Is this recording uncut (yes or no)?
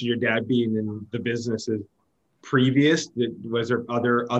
yes